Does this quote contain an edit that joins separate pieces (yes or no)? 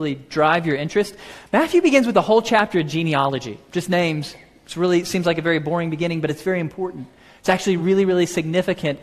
no